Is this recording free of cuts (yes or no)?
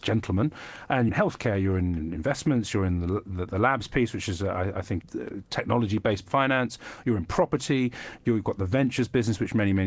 no